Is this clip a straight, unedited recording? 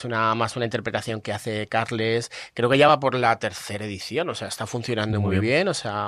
yes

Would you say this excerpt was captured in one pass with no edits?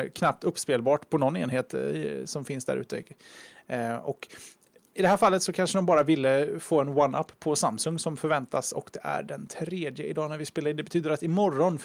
yes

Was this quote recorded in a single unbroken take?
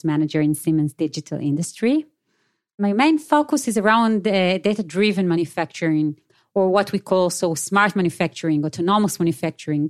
yes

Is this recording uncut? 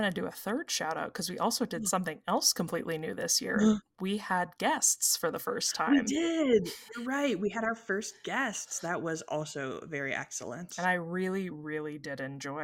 yes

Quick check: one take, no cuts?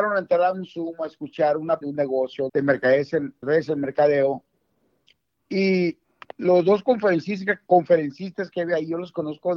no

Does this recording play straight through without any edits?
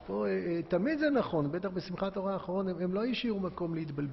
yes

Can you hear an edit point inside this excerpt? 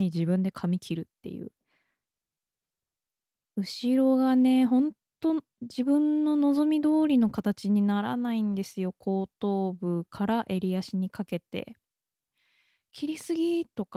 no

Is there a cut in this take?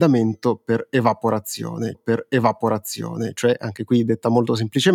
yes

